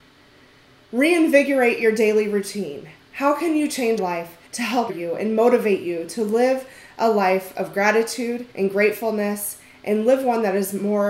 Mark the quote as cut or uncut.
cut